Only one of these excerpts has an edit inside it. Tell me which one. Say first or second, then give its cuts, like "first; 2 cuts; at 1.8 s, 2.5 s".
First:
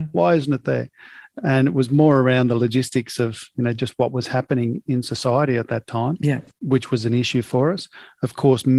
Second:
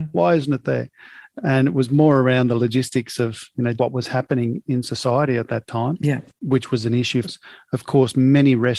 second; 2 cuts; at 3.8 s, 7.2 s